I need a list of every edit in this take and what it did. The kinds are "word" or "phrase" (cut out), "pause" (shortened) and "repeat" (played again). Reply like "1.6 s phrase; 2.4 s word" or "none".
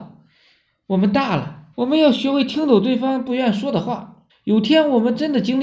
1.7 s pause; 4.3 s pause